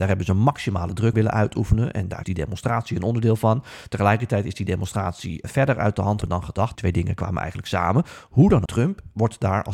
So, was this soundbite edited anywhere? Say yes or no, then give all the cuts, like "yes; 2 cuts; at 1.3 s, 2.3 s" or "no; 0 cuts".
yes; 6 cuts; at 1.1 s, 2.2 s, 5.4 s, 6.2 s, 6.7 s, 8.7 s